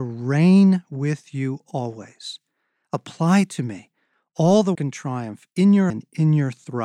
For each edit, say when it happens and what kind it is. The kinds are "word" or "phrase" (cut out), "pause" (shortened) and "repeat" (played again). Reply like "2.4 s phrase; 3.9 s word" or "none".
4.7 s word; 5.9 s word